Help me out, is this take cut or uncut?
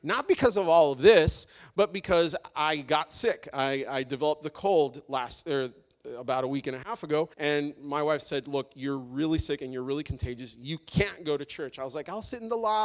cut